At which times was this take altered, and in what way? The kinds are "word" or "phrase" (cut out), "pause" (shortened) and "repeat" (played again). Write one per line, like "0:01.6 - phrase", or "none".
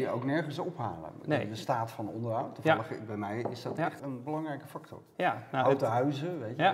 0:04.0 - word